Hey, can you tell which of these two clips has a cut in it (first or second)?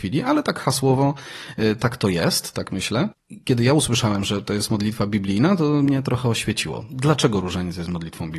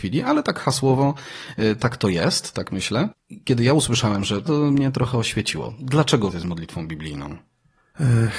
second